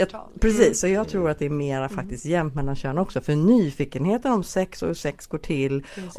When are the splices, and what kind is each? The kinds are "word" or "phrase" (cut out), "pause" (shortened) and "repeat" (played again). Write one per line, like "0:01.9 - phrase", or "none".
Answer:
none